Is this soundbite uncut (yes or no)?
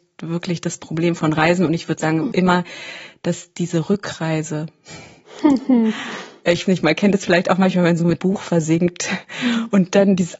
no